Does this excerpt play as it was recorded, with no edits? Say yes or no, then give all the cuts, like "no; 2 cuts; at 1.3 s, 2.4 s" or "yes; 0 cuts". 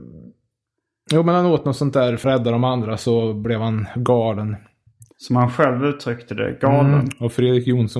no; 1 cut; at 2.2 s